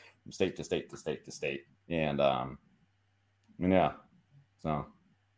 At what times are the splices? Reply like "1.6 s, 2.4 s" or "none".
1.8 s